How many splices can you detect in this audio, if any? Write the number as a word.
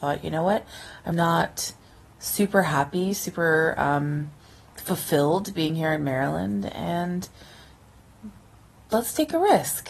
one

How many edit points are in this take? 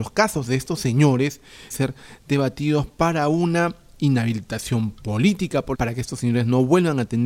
two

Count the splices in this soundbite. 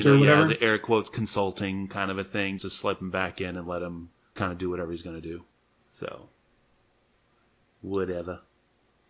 three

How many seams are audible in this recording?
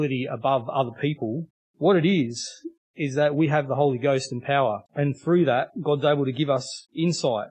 two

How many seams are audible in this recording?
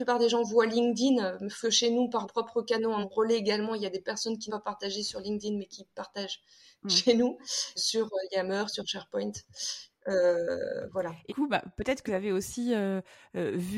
seven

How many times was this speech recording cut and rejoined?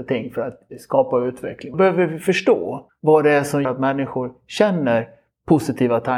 three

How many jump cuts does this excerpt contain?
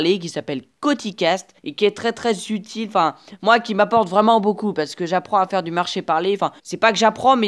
two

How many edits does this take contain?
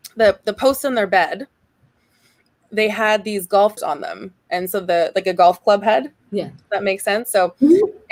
two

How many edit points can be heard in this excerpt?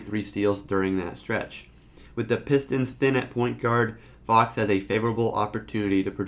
zero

